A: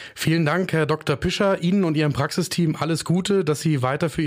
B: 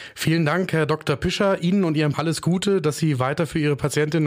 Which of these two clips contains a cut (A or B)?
B